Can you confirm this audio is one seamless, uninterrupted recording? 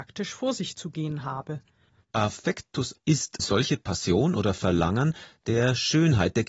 no; 2 cuts; at 3.0 s, 3.4 s

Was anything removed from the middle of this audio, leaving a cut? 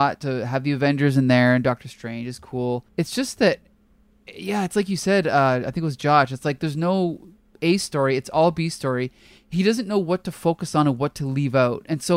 yes; 1 cut; at 2.9 s

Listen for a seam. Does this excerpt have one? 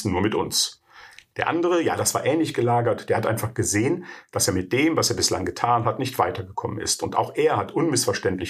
no; 0 cuts

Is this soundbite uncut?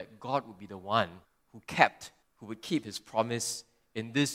no; 2 cuts; at 1.2 s, 2.2 s

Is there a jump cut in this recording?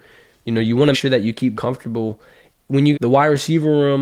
yes; 3 cuts; at 0.9 s, 1.5 s, 2.9 s

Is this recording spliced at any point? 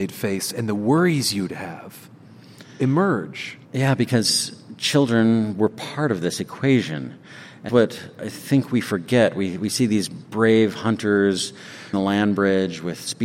yes; 3 cuts; at 3.6 s, 7.7 s, 11.9 s

